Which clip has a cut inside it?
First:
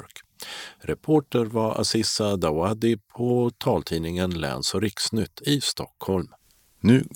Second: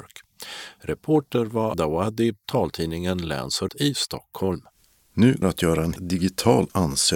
second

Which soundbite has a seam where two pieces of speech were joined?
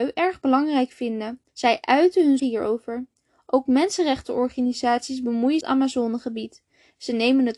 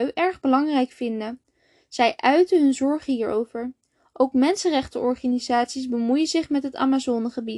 first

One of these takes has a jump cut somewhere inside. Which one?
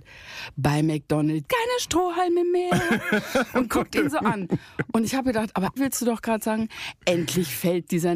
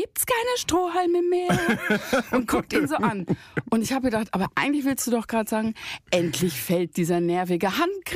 first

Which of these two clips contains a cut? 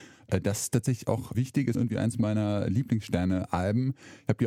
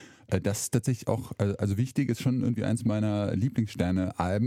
first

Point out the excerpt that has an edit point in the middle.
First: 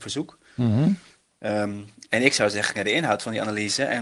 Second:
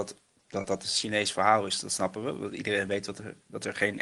first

